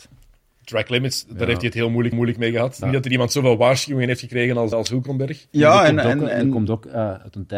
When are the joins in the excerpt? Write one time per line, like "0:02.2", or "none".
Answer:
0:02.1
0:02.8
0:04.7